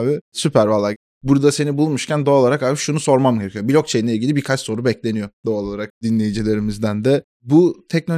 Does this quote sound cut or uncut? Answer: uncut